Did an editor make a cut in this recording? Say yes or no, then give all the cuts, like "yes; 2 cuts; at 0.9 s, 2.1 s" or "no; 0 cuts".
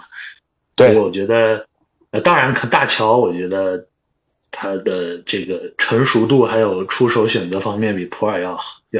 no; 0 cuts